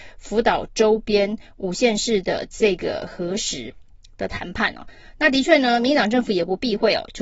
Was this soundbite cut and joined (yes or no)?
no